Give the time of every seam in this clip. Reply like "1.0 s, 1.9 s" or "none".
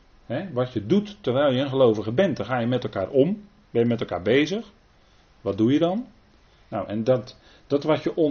none

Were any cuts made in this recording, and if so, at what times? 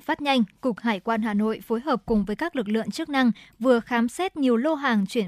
none

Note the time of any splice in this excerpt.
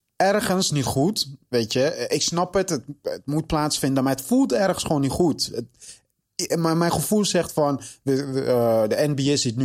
none

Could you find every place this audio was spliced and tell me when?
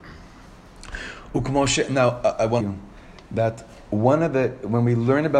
2.6 s

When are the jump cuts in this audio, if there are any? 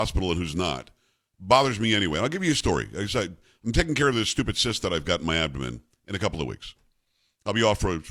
none

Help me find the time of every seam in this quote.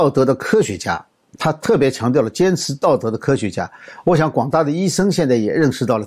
none

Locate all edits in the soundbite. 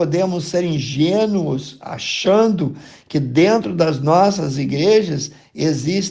none

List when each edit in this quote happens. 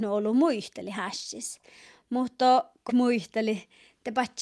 2.9 s

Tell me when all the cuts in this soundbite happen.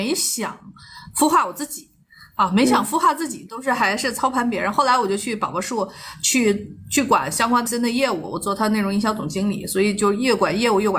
7.7 s

